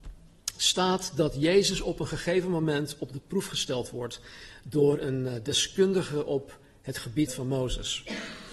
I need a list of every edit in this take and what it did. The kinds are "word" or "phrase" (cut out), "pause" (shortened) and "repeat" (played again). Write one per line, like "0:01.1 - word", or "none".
0:07.3 - phrase